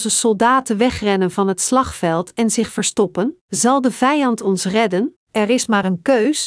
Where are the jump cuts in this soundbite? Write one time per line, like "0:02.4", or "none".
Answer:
0:03.4
0:05.2